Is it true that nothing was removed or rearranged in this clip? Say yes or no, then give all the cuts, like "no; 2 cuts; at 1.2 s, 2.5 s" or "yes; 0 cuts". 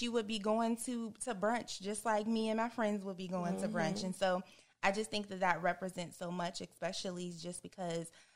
yes; 0 cuts